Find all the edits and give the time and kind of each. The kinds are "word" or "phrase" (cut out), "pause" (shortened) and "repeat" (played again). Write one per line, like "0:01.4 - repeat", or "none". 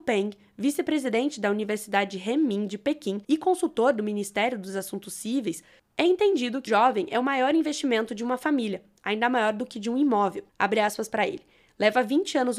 0:03.2 - pause
0:06.7 - word
0:10.5 - pause

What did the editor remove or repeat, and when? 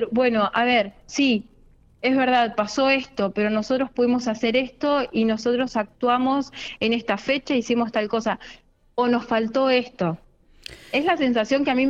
none

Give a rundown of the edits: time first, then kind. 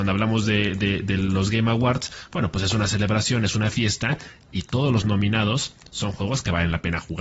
none

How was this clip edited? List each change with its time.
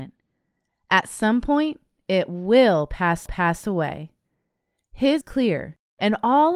0:03.3 - repeat
0:05.2 - phrase

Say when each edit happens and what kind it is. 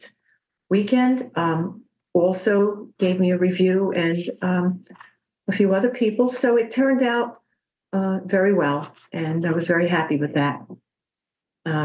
none

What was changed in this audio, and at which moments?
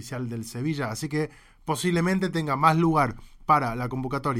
none

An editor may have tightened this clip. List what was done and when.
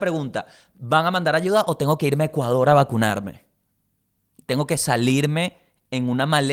none

